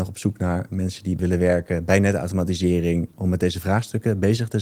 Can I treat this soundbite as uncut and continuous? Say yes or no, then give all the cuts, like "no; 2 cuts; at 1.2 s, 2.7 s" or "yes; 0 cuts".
no; 2 cuts; at 1.2 s, 3.1 s